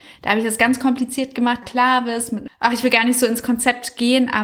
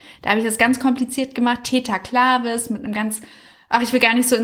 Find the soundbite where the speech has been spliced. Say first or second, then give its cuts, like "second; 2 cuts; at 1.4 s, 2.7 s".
first; 2 cuts; at 1.6 s, 2.5 s